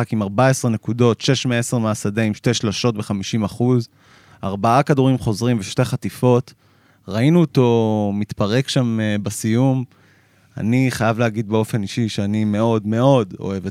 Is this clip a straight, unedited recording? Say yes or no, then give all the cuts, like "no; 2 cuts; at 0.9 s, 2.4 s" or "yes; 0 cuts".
yes; 0 cuts